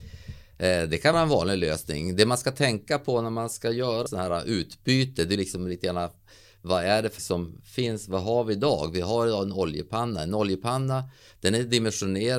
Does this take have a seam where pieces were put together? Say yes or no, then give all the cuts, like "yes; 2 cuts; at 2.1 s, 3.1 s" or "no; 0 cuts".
yes; 4 cuts; at 1.1 s, 4.1 s, 5.4 s, 7.2 s